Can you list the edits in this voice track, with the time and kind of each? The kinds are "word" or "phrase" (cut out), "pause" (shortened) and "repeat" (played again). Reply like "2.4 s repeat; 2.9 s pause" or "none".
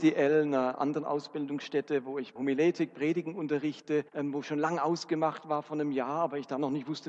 2.4 s word; 4.1 s pause